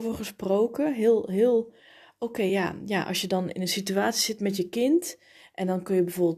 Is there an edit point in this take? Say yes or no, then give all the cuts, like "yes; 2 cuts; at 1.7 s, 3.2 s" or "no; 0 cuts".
no; 0 cuts